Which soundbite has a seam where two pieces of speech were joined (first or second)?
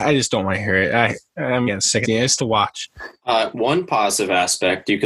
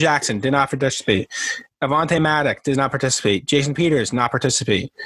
first